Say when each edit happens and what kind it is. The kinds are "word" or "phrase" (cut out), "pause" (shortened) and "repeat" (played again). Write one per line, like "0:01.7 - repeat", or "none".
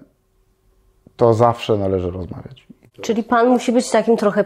none

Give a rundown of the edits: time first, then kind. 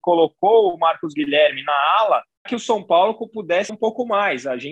0:02.5 - word
0:03.7 - word

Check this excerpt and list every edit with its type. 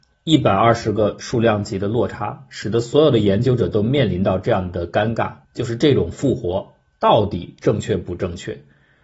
0:05.4 - pause

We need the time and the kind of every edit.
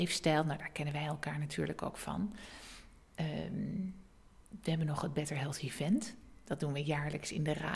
none

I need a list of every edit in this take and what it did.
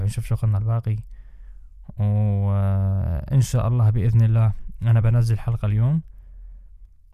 none

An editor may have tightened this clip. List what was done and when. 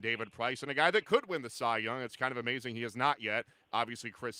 none

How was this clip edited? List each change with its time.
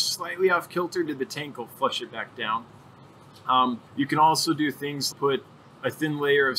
0:01.1 - word
0:03.9 - pause
0:05.1 - word

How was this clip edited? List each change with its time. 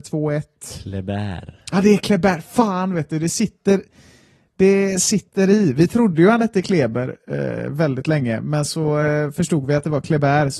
none

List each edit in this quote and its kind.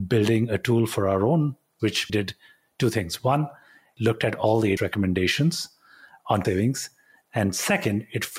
0:01.8 - word
0:02.1 - word
0:04.0 - word
0:04.8 - word
0:06.4 - word

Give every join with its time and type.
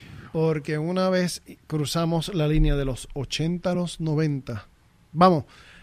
none

